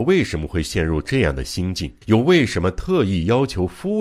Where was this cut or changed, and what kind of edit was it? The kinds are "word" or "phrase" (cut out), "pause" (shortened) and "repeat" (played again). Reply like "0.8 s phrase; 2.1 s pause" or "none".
2.0 s pause

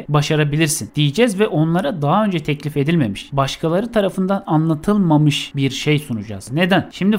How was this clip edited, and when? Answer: none

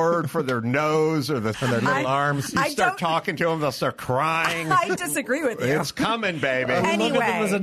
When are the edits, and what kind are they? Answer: 1.5 s word; 5.0 s phrase

